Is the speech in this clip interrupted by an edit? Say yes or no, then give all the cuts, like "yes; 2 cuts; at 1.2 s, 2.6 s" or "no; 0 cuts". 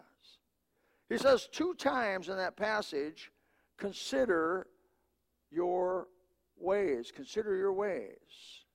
no; 0 cuts